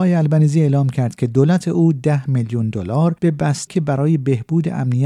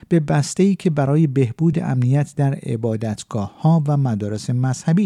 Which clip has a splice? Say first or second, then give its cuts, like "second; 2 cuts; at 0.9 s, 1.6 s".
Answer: first; 2 cuts; at 3.2 s, 3.7 s